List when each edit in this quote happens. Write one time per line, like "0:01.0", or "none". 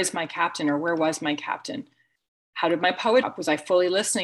0:03.2